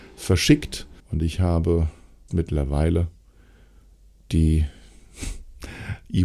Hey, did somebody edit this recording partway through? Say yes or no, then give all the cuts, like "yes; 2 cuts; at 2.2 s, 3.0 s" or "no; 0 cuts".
yes; 2 cuts; at 1.0 s, 2.3 s